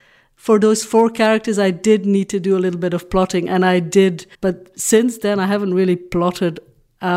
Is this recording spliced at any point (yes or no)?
yes